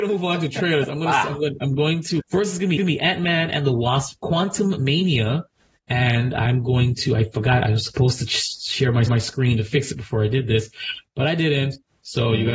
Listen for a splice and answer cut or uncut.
cut